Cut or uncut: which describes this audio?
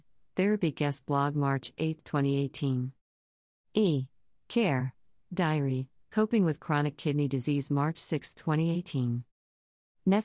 uncut